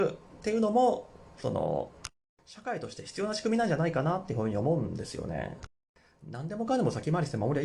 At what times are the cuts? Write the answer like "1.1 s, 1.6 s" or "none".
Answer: none

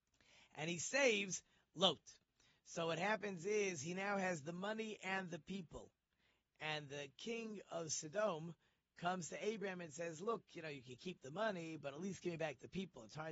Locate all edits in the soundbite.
none

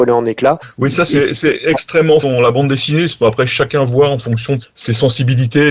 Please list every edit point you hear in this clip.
2.2 s, 4.6 s

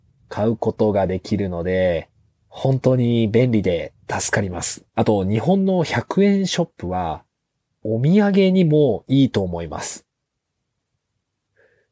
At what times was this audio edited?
4.9 s

